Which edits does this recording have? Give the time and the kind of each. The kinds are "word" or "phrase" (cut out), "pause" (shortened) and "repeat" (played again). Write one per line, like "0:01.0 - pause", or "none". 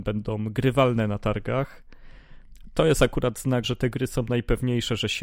0:03.6 - word